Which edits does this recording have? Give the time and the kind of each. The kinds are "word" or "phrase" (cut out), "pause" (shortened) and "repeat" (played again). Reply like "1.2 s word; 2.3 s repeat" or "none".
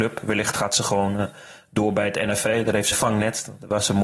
2.9 s phrase